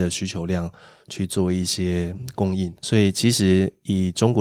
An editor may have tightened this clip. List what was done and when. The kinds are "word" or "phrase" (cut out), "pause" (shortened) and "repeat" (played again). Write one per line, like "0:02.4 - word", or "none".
0:02.8 - pause